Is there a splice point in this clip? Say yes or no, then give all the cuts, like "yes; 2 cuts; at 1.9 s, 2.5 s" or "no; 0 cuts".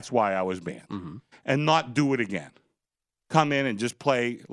no; 0 cuts